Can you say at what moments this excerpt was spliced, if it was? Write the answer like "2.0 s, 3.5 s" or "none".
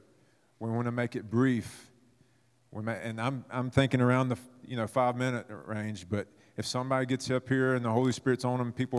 none

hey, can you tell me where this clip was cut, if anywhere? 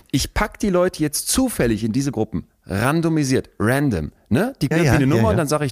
2.1 s, 4.7 s

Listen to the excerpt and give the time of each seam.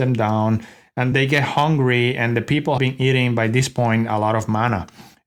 1.1 s, 2.8 s

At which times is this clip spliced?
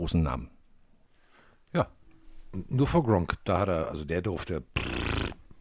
none

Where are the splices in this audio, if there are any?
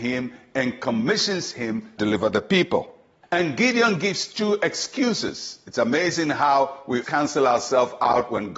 2.0 s, 3.2 s, 7.0 s

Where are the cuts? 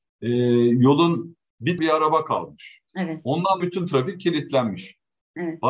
1.8 s, 2.9 s, 3.6 s

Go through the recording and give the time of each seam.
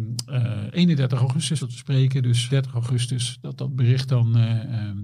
1.6 s, 2.5 s

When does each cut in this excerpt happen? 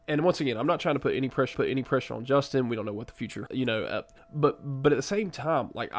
1.5 s, 3.5 s, 4.2 s

